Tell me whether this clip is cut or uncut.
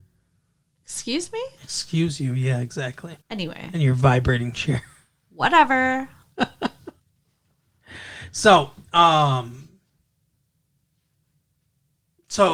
cut